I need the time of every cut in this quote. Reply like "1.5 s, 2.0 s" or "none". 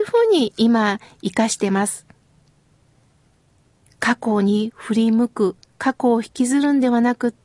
none